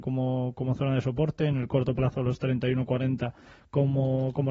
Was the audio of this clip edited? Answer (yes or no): no